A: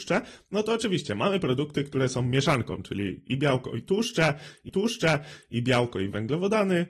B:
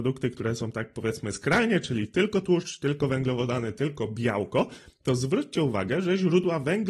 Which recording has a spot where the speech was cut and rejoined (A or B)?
A